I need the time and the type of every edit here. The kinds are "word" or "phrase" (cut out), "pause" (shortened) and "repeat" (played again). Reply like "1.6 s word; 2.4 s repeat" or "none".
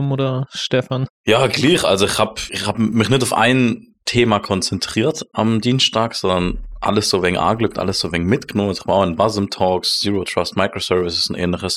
2.5 s word